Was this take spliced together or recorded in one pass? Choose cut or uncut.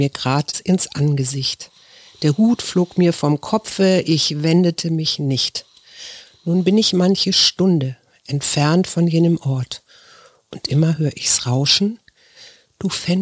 uncut